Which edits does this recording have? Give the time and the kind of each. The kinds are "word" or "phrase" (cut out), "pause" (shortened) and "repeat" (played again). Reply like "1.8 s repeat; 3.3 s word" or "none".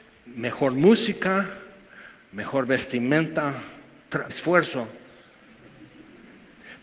4.3 s word